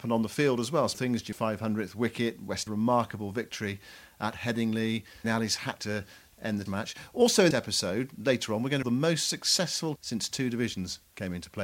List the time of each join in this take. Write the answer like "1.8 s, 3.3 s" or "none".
0.9 s, 1.3 s, 2.7 s, 5.2 s, 5.8 s, 6.7 s, 7.5 s, 8.8 s, 10.0 s